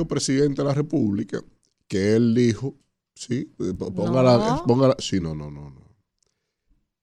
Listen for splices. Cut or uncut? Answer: uncut